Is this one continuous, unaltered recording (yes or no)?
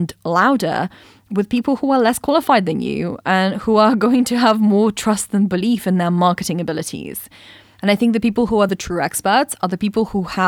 yes